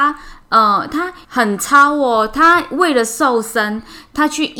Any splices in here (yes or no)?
yes